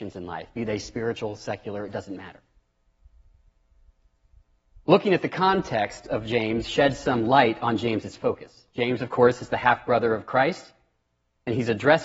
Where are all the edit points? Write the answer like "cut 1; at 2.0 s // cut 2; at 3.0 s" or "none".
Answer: none